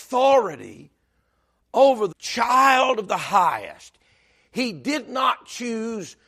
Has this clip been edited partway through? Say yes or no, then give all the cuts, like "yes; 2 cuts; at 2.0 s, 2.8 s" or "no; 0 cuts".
yes; 1 cut; at 2.1 s